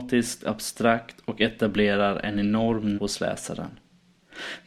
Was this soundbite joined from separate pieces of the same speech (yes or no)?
yes